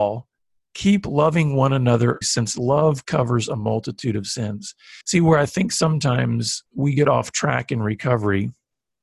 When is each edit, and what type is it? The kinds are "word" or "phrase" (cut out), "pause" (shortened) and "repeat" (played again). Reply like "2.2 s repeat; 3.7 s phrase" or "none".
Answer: 2.2 s word; 5.0 s pause; 6.7 s pause